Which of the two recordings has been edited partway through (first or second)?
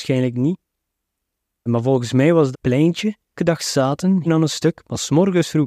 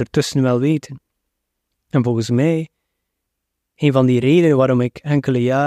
first